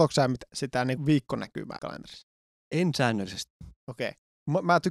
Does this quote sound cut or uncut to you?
cut